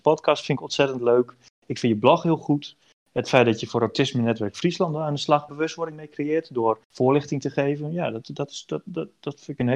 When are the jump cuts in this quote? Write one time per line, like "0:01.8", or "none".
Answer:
0:05.5
0:06.8